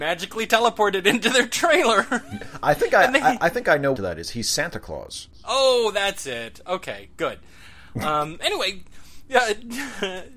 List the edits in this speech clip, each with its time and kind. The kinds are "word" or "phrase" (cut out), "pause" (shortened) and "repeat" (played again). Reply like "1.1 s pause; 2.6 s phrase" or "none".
4.0 s phrase